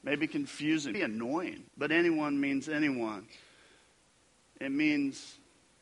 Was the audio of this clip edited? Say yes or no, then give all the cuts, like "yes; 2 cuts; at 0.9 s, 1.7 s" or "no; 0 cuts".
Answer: yes; 2 cuts; at 0.9 s, 1.7 s